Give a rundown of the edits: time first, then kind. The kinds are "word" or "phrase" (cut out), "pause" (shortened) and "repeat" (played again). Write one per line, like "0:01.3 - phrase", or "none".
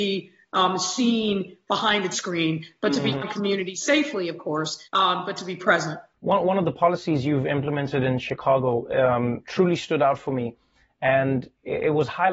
0:02.1 - word
0:03.2 - word
0:04.8 - pause
0:06.1 - pause
0:09.4 - word